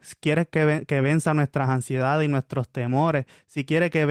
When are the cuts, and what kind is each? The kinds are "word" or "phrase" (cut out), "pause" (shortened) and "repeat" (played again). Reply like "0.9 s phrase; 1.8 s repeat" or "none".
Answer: none